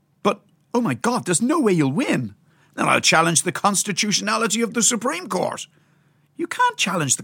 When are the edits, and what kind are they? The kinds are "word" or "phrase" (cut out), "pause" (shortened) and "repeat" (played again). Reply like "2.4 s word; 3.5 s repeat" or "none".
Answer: none